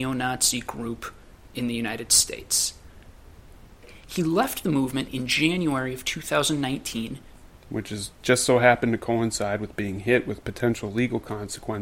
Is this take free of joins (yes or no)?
yes